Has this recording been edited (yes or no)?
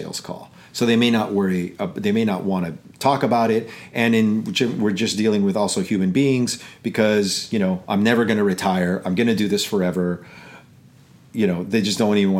no